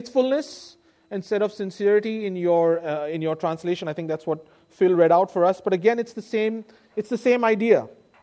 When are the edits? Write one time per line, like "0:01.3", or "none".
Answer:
none

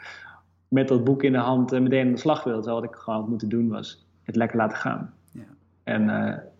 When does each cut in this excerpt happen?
none

